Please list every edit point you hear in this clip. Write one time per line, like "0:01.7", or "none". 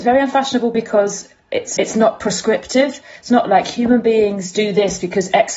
0:01.8
0:03.3